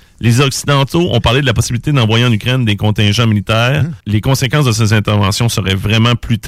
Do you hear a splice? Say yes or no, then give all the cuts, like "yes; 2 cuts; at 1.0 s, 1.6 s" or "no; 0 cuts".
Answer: yes; 1 cut; at 4.0 s